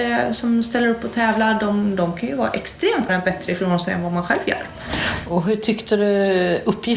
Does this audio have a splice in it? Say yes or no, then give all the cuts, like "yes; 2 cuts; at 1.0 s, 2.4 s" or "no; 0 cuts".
yes; 1 cut; at 3.1 s